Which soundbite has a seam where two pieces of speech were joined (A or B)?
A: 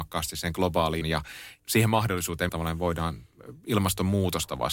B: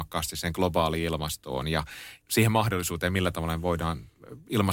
A